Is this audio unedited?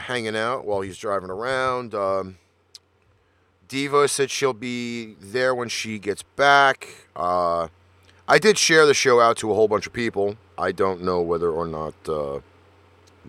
yes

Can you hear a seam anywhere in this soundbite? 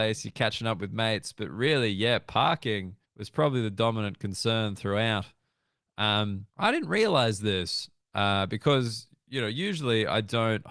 yes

